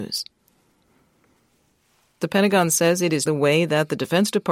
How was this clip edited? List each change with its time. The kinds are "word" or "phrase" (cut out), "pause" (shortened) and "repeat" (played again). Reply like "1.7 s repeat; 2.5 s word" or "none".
3.3 s word